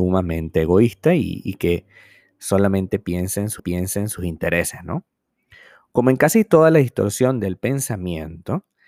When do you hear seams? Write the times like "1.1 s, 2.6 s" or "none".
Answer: 3.6 s